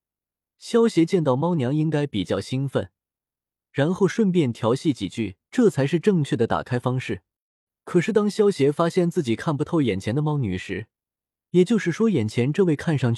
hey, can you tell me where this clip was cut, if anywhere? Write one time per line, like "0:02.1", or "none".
0:05.5